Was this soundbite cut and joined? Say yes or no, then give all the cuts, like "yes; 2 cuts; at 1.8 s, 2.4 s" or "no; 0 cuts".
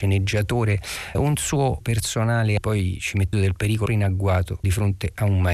yes; 5 cuts; at 1.1 s, 1.8 s, 3.3 s, 3.9 s, 4.6 s